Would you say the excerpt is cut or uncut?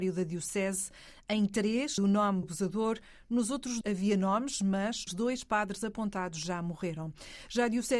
cut